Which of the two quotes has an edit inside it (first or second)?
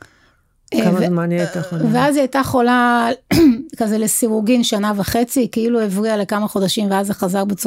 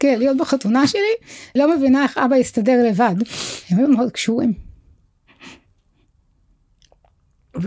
second